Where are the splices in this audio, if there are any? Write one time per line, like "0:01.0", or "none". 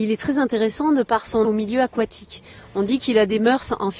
0:01.4